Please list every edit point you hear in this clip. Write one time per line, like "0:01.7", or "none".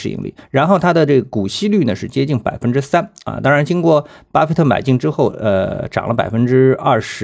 none